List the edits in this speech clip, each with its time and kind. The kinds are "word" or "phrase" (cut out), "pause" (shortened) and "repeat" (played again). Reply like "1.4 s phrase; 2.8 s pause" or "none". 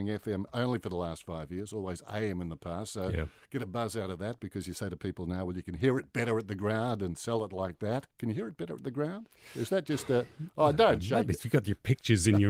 8.1 s pause